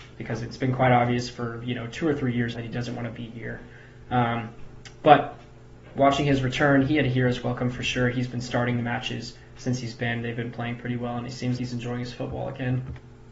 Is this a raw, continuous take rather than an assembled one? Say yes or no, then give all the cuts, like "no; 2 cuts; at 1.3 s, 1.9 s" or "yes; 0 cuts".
no; 2 cuts; at 2.5 s, 11.6 s